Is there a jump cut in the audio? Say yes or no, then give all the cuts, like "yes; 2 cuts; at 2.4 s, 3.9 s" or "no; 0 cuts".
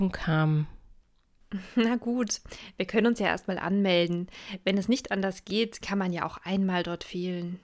no; 0 cuts